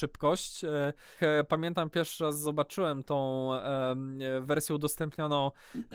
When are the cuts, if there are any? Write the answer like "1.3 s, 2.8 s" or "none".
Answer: 1.2 s